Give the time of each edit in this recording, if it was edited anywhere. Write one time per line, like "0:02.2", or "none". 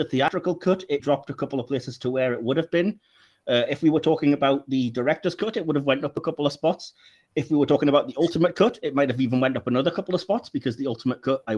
0:01.0